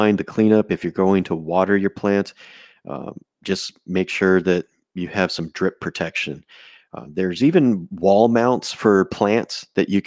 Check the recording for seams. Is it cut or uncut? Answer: uncut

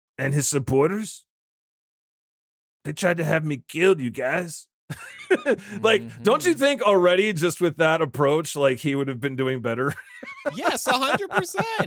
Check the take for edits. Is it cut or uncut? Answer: uncut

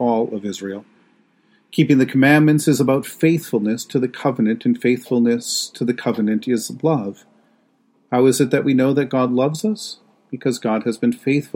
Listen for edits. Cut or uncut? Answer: uncut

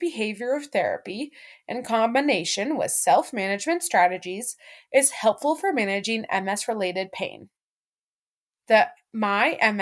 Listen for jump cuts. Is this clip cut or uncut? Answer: uncut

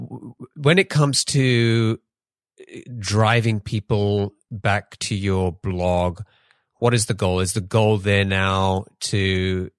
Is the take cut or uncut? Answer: uncut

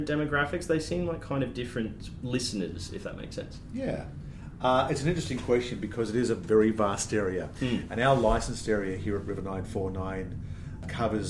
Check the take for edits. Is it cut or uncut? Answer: uncut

